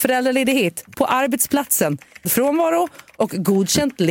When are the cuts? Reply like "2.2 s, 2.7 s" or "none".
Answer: 0.9 s, 2.2 s